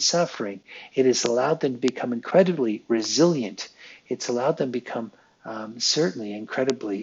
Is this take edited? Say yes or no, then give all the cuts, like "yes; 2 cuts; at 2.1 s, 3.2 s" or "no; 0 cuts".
no; 0 cuts